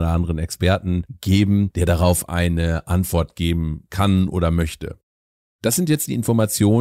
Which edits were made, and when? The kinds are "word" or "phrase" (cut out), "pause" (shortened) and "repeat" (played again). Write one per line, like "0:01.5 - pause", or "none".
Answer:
none